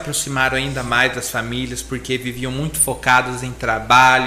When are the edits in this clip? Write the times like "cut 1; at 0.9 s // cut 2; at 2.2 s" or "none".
none